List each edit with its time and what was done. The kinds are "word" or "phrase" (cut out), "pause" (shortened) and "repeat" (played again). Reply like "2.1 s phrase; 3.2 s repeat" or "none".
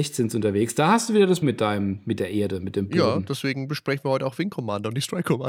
1.4 s word